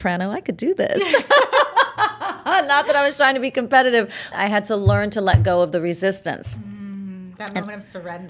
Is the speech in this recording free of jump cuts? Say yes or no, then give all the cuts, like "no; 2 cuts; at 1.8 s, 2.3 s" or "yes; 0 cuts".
no; 1 cut; at 4.3 s